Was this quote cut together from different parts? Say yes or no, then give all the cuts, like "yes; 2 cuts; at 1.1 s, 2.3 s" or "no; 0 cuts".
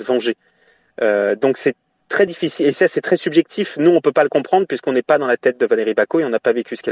no; 0 cuts